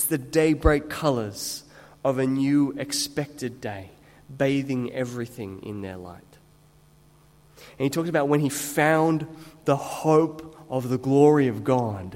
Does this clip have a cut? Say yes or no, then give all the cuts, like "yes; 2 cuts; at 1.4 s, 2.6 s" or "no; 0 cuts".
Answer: no; 0 cuts